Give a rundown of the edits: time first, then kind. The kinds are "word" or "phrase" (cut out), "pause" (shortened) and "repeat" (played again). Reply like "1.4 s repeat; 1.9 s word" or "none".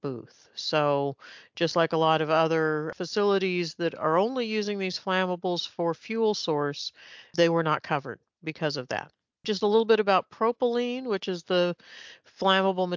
none